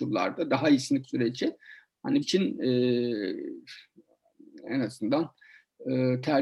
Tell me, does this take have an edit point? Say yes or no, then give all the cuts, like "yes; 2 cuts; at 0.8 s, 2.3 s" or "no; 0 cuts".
yes; 2 cuts; at 1.0 s, 2.2 s